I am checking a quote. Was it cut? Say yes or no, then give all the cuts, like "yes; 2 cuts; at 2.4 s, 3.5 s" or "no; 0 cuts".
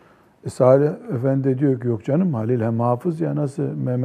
no; 0 cuts